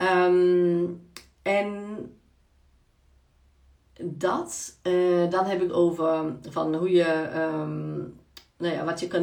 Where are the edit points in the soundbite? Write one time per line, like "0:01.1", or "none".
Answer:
0:05.7